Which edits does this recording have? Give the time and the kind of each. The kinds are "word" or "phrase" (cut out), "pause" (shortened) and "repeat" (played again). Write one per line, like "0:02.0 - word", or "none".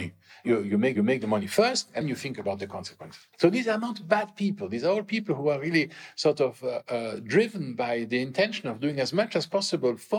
0:00.9 - repeat
0:02.0 - word
0:03.3 - pause